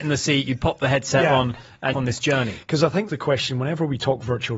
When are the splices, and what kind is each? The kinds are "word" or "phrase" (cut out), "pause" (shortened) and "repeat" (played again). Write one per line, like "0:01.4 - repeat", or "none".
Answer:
0:01.9 - phrase
0:03.1 - word

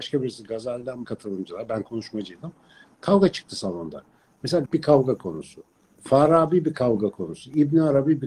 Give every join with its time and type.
0:01.0 - word
0:04.7 - word

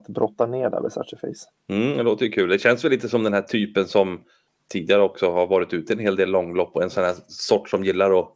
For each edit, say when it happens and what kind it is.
0:01.6 - pause
0:04.5 - pause

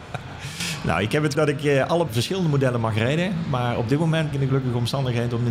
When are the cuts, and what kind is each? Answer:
0:01.3 - word
0:02.1 - word
0:04.3 - phrase

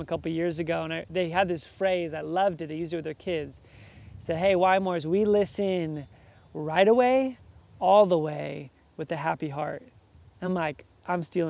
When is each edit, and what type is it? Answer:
none

